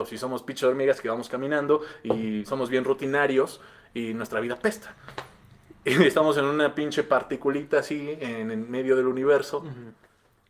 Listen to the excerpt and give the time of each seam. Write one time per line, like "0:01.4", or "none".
none